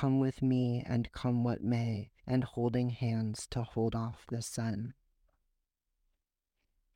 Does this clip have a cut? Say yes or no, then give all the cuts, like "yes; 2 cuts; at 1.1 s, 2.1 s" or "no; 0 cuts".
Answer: yes; 1 cut; at 2.2 s